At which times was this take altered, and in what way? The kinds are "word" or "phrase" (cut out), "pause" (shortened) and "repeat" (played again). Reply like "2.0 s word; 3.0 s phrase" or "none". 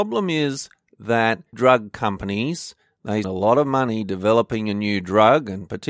1.5 s word; 3.2 s word